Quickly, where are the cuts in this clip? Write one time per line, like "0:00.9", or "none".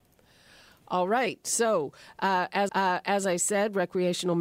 0:02.7